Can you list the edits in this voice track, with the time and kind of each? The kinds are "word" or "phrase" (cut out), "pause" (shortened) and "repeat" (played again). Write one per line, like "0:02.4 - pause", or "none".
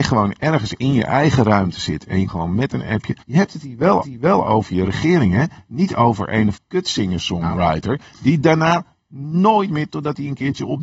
0:02.3 - word
0:03.2 - pause
0:04.0 - repeat
0:06.6 - word
0:09.9 - phrase